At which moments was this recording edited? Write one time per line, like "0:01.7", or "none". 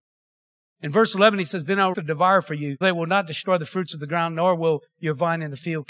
0:01.9
0:02.8